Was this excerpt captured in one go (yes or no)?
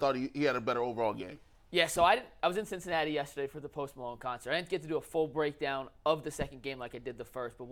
yes